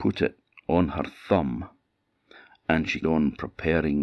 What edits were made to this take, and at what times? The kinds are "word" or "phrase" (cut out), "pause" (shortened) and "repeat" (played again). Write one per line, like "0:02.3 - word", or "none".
0:03.0 - word